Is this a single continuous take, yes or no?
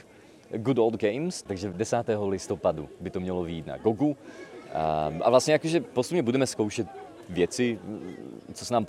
yes